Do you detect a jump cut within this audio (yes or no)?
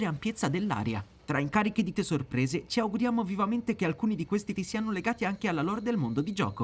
yes